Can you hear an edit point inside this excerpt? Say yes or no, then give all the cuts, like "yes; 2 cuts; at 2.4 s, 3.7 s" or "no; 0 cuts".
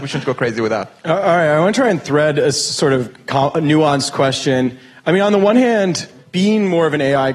no; 0 cuts